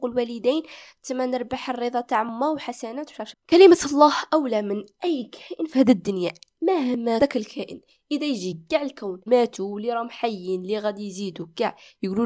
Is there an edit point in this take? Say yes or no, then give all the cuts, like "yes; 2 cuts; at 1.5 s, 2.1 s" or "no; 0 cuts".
yes; 3 cuts; at 3.3 s, 7.2 s, 9.3 s